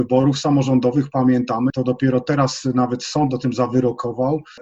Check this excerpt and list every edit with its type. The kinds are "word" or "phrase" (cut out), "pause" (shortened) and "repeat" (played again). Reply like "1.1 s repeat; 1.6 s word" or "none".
1.7 s word